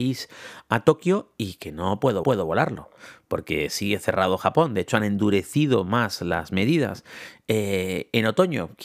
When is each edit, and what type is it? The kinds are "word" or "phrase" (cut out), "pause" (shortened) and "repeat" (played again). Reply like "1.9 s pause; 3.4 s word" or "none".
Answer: 2.2 s repeat